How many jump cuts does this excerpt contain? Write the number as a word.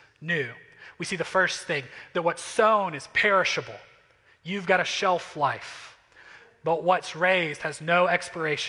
zero